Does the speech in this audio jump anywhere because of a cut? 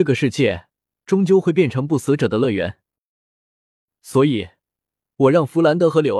no; 0 cuts

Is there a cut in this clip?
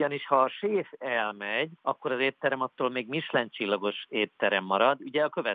yes; 1 cut; at 1.8 s

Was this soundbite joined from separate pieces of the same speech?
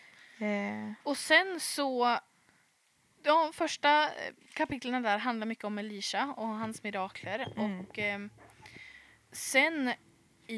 yes; 1 cut; at 1.0 s

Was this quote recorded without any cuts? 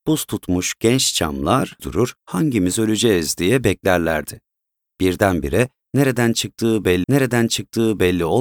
no; 3 cuts; at 1.8 s, 2.2 s, 7.0 s

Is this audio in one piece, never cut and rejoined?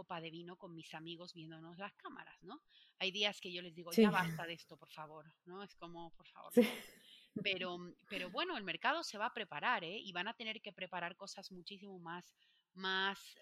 yes; 0 cuts

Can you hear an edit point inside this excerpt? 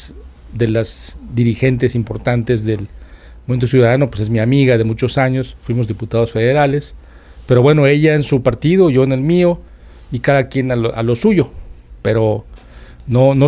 no; 0 cuts

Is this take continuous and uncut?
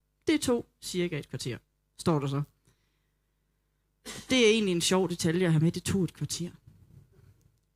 yes; 0 cuts

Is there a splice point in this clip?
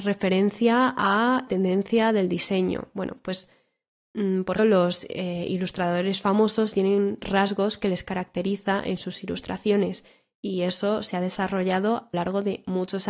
yes; 4 cuts; at 1.5 s, 4.6 s, 6.7 s, 12.1 s

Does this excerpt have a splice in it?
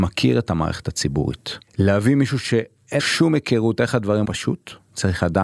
yes; 3 cuts; at 1.7 s, 3.0 s, 4.2 s

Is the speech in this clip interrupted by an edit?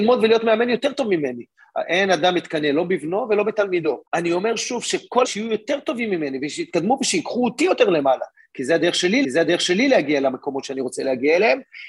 yes; 3 cuts; at 4.1 s, 5.2 s, 9.2 s

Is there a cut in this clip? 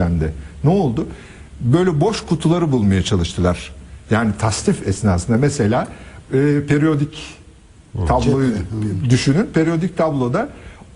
no; 0 cuts

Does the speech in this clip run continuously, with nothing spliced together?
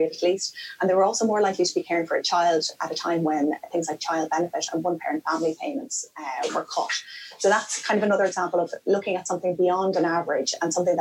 yes; 0 cuts

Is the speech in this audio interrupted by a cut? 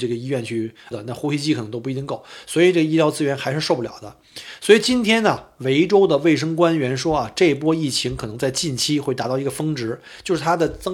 yes; 1 cut; at 0.9 s

